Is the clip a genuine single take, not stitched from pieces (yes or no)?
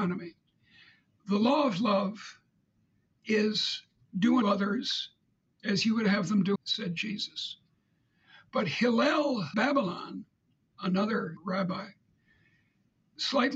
no